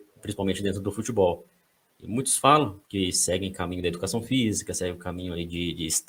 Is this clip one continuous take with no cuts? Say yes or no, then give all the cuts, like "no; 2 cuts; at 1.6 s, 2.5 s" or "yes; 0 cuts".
no; 1 cut; at 2.8 s